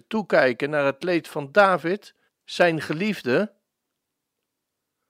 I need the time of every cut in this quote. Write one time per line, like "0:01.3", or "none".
0:02.3